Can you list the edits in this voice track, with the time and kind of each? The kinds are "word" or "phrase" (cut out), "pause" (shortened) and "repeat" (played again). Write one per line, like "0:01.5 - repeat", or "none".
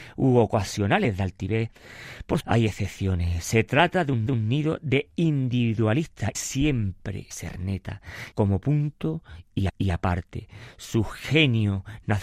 0:02.4 - word
0:04.3 - repeat
0:06.3 - word
0:07.3 - word
0:08.3 - word
0:09.7 - repeat